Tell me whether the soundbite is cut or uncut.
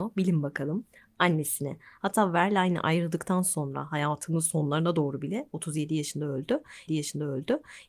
cut